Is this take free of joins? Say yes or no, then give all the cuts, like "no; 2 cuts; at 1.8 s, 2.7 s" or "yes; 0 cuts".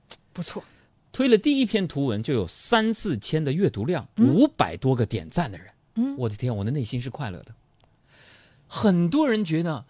yes; 0 cuts